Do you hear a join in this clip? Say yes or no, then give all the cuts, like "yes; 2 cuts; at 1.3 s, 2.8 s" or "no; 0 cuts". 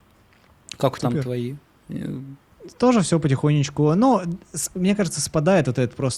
yes; 1 cut; at 1.0 s